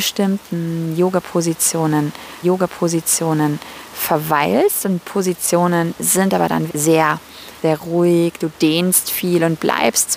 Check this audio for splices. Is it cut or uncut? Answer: cut